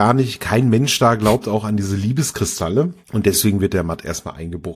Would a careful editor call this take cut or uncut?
cut